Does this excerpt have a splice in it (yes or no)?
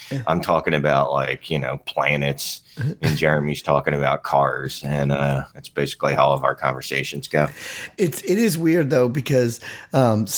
yes